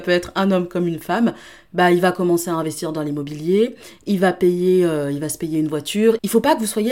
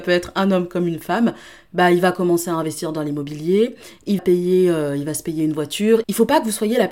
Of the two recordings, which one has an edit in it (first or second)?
second